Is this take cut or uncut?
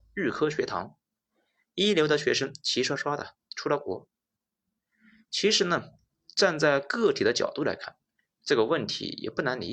uncut